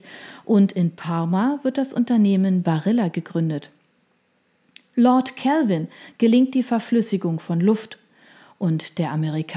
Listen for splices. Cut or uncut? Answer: uncut